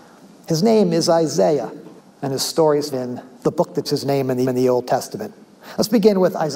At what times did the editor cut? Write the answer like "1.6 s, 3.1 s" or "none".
2.0 s, 2.9 s, 3.4 s, 3.8 s, 4.4 s